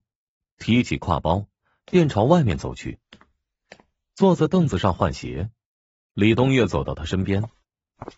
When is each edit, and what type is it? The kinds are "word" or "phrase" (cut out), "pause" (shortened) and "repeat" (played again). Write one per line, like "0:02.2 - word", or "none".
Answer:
none

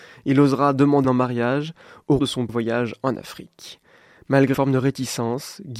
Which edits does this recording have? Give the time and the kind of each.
0:01.0 - word
0:02.2 - word
0:02.5 - word
0:04.5 - word

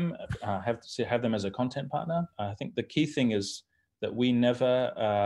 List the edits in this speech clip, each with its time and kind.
0:02.3 - pause

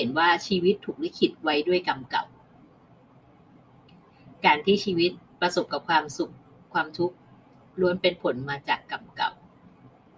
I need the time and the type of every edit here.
none

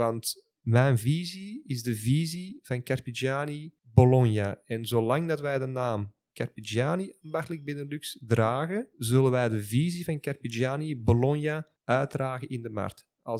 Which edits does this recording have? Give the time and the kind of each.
0:03.8 - pause
0:08.9 - pause
0:11.8 - pause

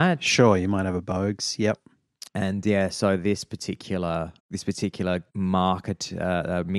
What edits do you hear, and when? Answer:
0:02.3 - pause
0:04.4 - pause
0:05.3 - pause

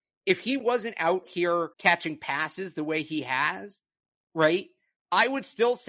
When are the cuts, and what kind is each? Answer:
0:01.7 - pause

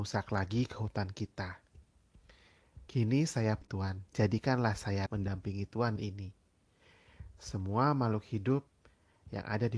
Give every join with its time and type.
0:02.9 - pause
0:03.6 - phrase
0:04.1 - pause
0:05.1 - word
0:06.0 - phrase

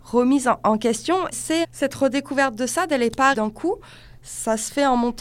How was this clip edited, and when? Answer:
0:01.3 - word
0:01.6 - word
0:03.3 - word

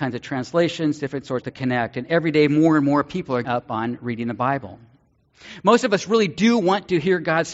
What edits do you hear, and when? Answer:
0:01.4 - phrase
0:03.4 - word

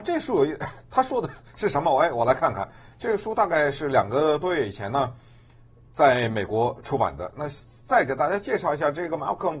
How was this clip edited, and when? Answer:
0:02.9 - pause

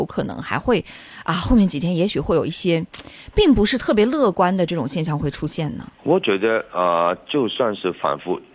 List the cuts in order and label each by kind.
0:05.9 - pause

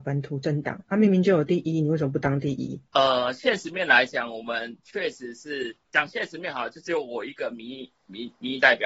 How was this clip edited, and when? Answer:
0:02.9 - pause
0:05.8 - pause

